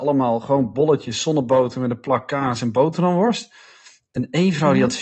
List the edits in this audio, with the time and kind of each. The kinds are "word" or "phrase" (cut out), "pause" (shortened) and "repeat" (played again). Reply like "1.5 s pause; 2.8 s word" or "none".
none

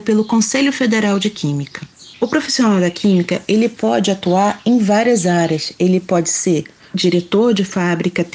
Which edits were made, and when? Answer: none

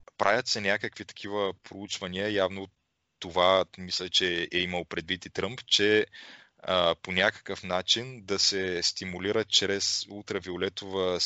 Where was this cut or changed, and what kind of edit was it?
none

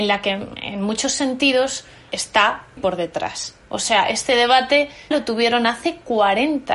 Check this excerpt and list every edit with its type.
2.1 s word; 2.8 s word; 5.1 s word

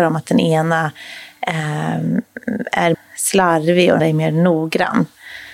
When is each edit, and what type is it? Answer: 2.9 s word; 4.0 s word

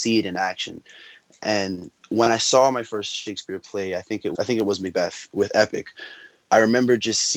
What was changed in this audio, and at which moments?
4.3 s word

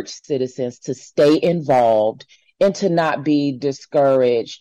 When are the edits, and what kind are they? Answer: 2.4 s pause

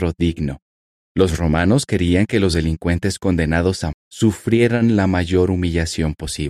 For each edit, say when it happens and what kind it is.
1.0 s pause; 3.9 s word

